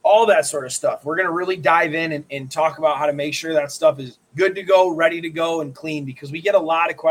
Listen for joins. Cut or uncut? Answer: cut